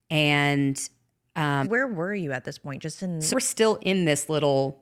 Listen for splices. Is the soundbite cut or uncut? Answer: cut